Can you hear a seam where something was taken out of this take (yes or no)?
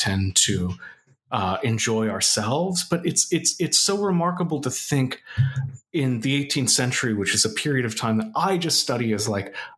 no